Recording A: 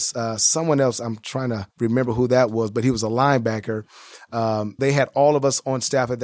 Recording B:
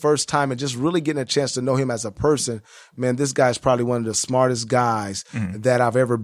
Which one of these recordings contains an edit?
A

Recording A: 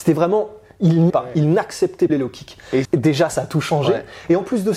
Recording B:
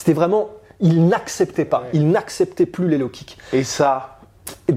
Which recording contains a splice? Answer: A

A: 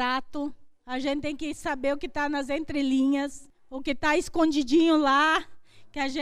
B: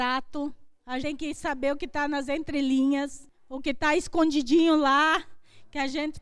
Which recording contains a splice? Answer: B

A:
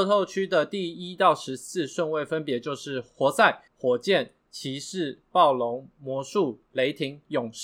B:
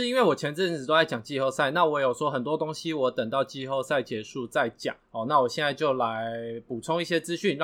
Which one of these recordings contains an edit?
A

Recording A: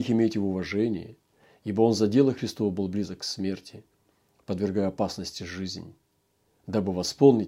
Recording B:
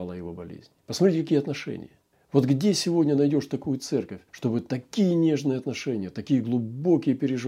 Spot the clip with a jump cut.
B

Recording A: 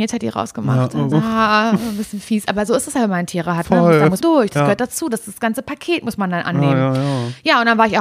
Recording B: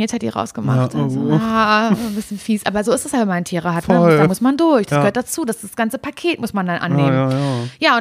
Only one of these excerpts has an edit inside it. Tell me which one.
A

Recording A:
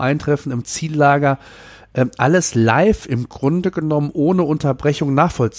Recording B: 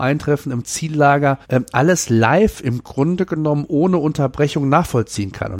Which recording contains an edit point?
B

